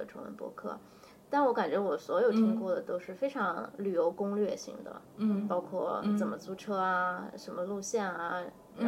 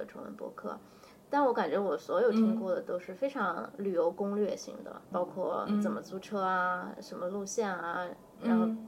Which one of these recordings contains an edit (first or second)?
second